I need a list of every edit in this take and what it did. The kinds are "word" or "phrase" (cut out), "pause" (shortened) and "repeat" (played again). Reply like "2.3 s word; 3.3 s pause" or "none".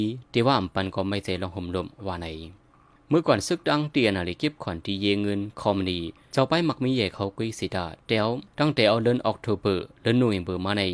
8.5 s pause